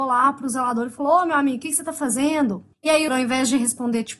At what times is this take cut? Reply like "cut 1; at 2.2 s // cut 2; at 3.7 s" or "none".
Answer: cut 1; at 2.7 s // cut 2; at 3.1 s